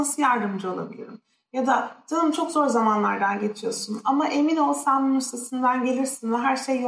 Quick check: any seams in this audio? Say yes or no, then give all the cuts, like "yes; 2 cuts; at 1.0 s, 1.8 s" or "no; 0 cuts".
no; 0 cuts